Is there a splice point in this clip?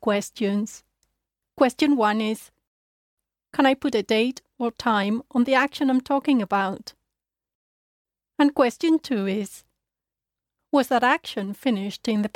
no; 0 cuts

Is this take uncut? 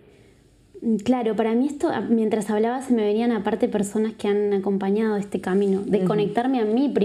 yes; 0 cuts

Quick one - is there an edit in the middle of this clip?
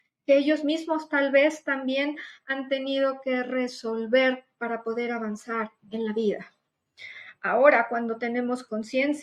no; 0 cuts

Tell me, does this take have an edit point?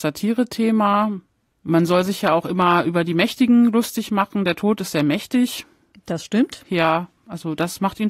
no; 0 cuts

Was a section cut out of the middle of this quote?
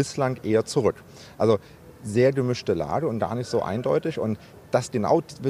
no; 0 cuts

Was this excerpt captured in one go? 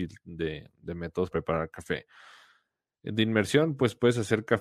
no; 1 cut; at 1.3 s

